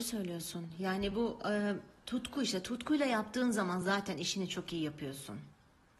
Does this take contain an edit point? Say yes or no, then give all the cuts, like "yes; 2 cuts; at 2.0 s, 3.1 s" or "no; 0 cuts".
no; 0 cuts